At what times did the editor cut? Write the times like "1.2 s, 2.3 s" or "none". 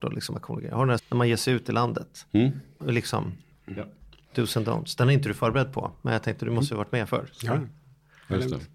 1.0 s, 2.8 s